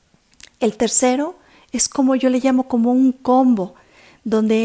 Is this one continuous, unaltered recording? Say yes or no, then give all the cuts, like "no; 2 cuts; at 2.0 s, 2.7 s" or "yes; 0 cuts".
yes; 0 cuts